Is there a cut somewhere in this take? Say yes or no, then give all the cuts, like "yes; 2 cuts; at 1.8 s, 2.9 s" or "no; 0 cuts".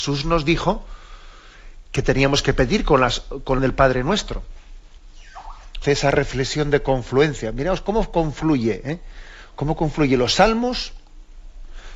yes; 3 cuts; at 1.8 s, 3.6 s, 5.8 s